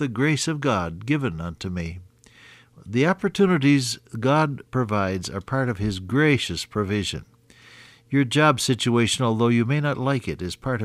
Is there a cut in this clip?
no; 0 cuts

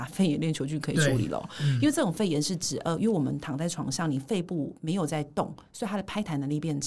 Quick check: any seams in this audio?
no; 0 cuts

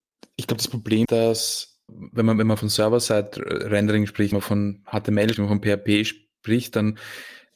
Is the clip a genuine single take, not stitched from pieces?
no; 5 cuts; at 1.0 s, 1.9 s, 2.6 s, 4.3 s, 5.3 s

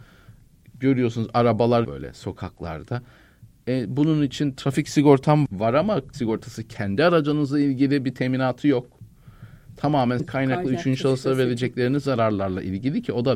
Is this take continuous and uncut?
no; 4 cuts; at 1.8 s, 5.5 s, 6.1 s, 10.2 s

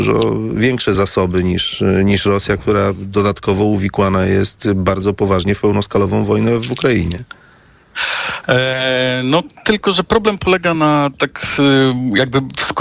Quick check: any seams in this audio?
no; 0 cuts

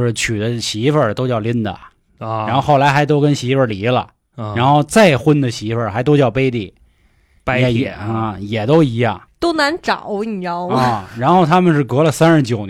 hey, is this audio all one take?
yes; 0 cuts

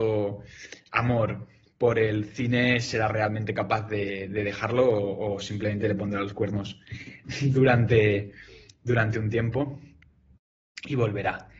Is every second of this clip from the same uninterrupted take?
yes; 0 cuts

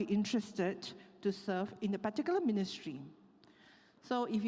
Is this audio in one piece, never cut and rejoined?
yes; 0 cuts

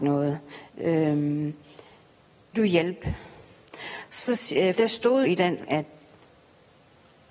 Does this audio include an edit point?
yes; 4 cuts; at 2.5 s, 4.7 s, 5.2 s, 5.7 s

